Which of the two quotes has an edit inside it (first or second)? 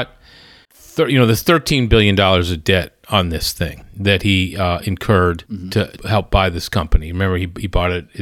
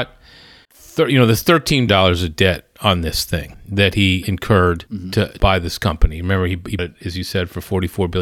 second